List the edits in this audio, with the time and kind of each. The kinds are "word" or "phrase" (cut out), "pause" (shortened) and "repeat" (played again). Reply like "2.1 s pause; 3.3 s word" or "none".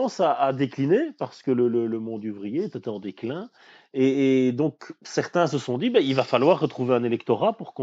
none